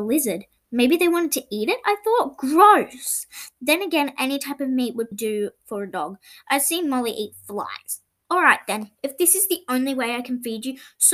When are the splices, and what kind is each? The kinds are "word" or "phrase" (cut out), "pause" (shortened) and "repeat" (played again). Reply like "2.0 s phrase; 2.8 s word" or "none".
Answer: 5.1 s word; 8.2 s pause